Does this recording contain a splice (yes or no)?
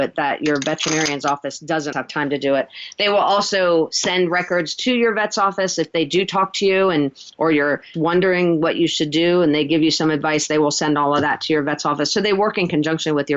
yes